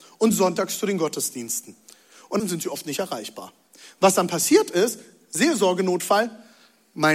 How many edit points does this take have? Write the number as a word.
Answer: one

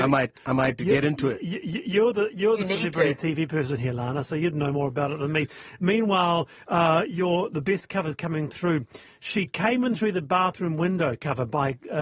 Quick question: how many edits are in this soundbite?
zero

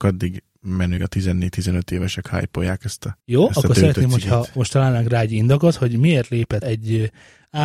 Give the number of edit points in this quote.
three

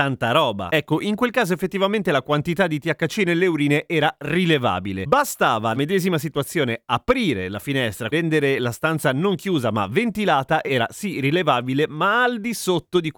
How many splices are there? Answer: three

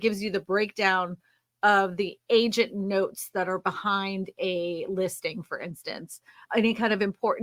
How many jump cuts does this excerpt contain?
one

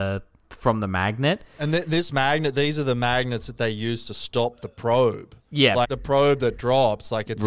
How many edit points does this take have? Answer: one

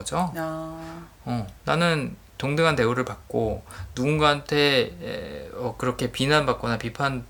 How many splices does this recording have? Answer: one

